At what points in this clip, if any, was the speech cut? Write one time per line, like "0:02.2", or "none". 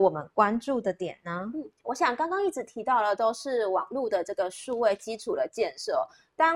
0:01.8